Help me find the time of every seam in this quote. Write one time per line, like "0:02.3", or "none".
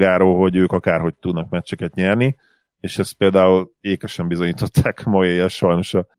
none